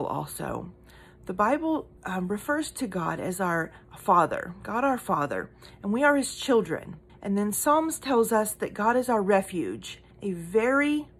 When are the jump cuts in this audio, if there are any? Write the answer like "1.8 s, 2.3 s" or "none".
2.0 s, 7.1 s, 10.1 s

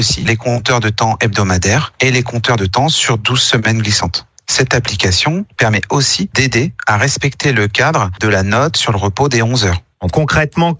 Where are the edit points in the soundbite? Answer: none

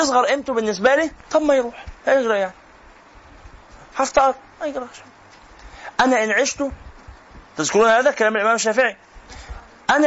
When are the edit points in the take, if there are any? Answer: 2.0 s, 7.5 s

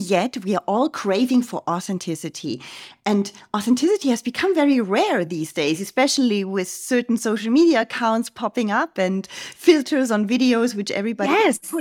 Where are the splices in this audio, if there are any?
none

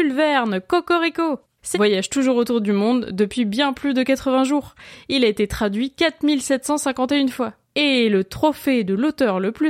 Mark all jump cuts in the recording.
1.7 s, 7.6 s

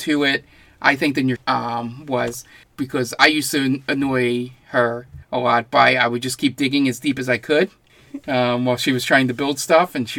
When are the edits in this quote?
1.4 s, 2.6 s, 5.2 s

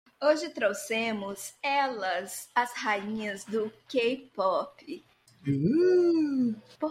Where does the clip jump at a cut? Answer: none

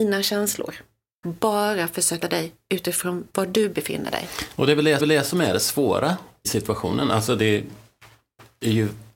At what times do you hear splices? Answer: 1.2 s, 2.2 s, 3.3 s, 5.0 s, 6.4 s

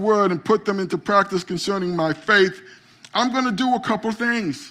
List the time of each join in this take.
none

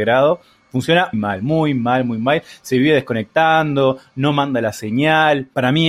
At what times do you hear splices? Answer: 1.1 s

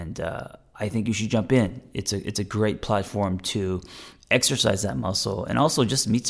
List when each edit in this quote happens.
none

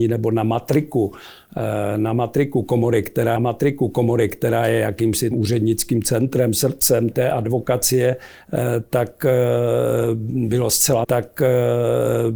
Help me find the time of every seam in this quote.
3.4 s, 5.3 s, 7.1 s, 11.0 s

